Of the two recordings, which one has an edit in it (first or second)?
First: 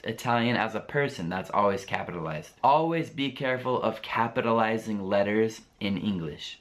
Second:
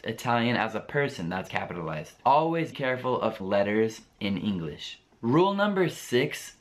second